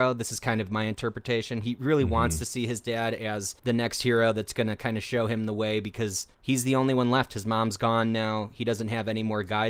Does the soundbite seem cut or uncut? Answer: cut